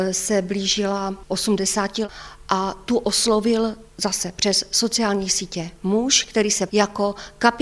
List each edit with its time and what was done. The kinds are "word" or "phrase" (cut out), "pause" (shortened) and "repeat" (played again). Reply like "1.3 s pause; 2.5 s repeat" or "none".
3.9 s pause; 6.7 s word